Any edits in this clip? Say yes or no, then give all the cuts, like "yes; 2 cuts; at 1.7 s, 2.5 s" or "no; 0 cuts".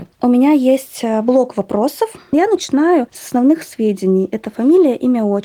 no; 0 cuts